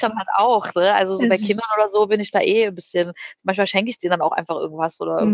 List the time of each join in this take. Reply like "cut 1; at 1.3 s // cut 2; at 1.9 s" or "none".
none

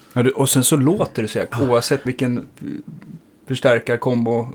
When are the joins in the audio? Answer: cut 1; at 1.5 s // cut 2; at 2.1 s

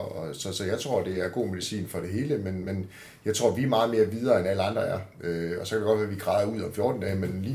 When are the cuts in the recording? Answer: none

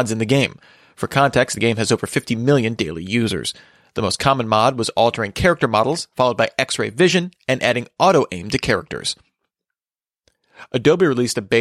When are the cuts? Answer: none

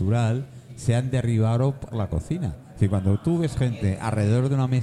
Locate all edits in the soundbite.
cut 1; at 1.9 s

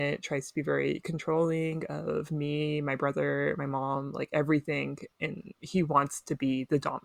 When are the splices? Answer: cut 1; at 5.6 s

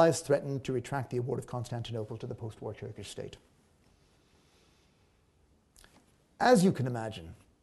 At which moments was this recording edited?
none

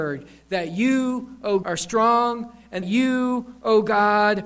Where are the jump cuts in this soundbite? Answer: cut 1; at 1.6 s // cut 2; at 2.8 s

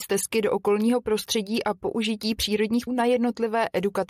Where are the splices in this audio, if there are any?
cut 1; at 2.9 s

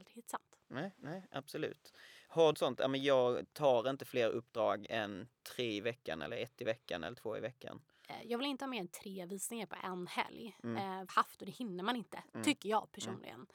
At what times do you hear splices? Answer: cut 1; at 2.5 s // cut 2; at 5.3 s // cut 3; at 11.1 s

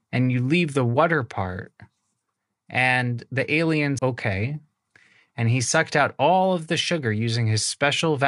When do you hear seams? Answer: cut 1; at 4.0 s

